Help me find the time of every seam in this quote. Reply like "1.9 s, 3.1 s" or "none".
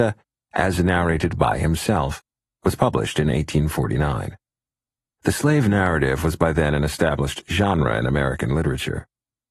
none